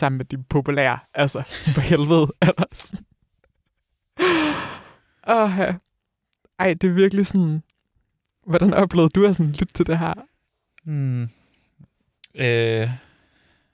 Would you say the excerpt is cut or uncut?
uncut